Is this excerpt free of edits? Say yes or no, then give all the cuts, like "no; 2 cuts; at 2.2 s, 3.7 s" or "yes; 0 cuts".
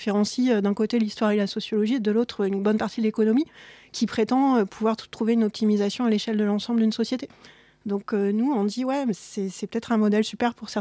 yes; 0 cuts